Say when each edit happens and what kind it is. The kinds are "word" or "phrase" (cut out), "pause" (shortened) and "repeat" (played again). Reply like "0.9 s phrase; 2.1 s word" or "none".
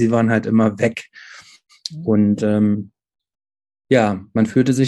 none